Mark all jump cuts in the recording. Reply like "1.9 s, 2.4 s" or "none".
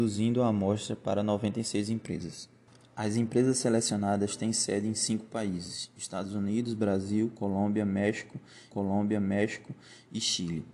2.7 s, 8.7 s